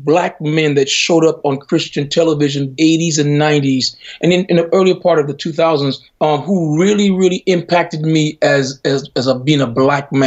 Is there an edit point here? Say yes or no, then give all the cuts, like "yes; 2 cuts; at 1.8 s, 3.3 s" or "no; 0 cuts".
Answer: yes; 2 cuts; at 2.8 s, 6.1 s